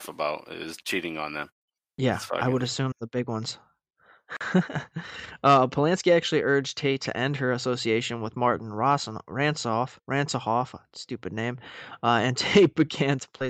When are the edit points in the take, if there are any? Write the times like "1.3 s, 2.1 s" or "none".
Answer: 1.8 s, 2.9 s, 10.0 s